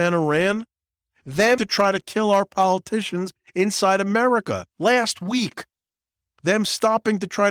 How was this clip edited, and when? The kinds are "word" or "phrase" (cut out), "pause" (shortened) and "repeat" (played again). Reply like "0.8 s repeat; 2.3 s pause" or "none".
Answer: 1.6 s word; 4.7 s pause

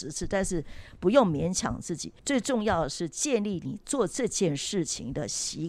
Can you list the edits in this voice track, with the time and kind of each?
2.2 s pause

